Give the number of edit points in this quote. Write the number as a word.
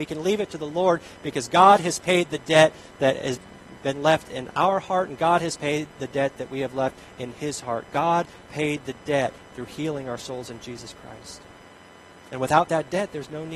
zero